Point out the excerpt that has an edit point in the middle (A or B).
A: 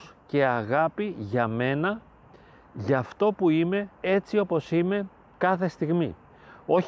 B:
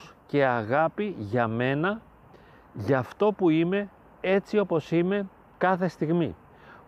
A